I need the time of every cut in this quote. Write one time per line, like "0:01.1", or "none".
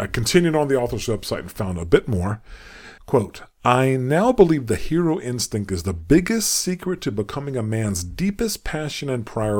0:03.0